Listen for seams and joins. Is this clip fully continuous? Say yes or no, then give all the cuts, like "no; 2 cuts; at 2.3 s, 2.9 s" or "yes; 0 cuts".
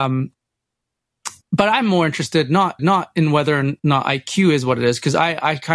no; 2 cuts; at 1.4 s, 2.8 s